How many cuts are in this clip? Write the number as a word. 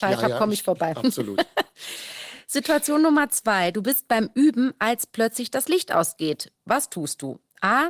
zero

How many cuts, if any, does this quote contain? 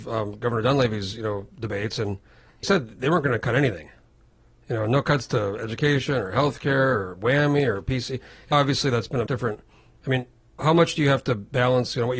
four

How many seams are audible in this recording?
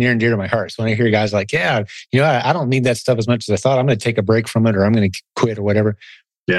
zero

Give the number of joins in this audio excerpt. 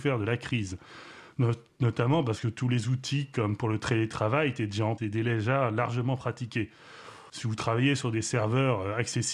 one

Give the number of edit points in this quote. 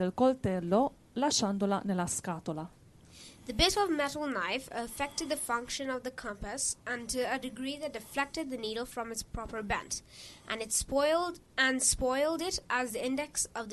one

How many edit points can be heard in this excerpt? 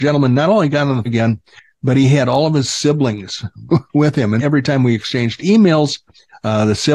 two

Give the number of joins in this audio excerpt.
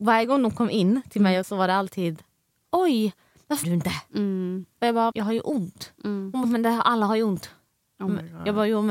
four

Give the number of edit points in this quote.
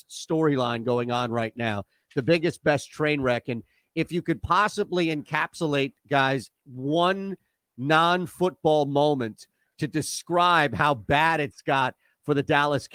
zero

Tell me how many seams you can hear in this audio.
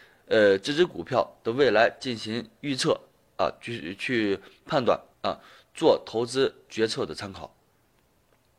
one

